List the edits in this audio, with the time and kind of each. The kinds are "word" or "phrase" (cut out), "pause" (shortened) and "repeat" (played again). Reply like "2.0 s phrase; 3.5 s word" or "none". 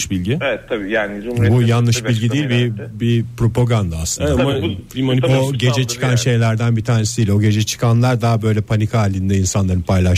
none